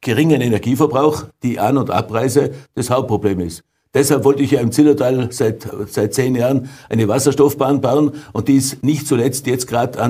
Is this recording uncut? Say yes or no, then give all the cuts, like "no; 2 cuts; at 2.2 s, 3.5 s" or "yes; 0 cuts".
yes; 0 cuts